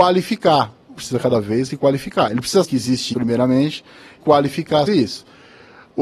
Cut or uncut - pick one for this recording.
cut